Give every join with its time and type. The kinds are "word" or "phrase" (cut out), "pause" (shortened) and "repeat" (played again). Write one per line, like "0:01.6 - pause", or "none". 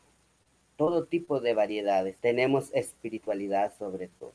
0:02.2 - pause